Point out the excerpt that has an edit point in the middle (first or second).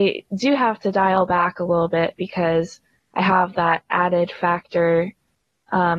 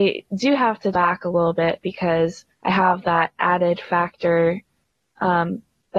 second